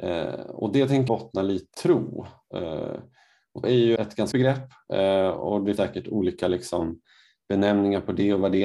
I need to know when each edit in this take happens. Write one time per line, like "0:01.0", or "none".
0:01.1
0:01.7
0:03.6
0:04.0
0:04.3
0:05.8